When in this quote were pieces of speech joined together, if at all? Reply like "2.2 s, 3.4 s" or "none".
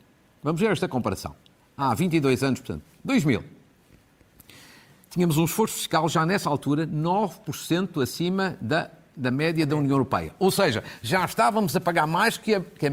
none